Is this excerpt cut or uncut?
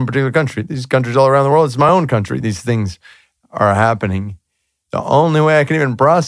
uncut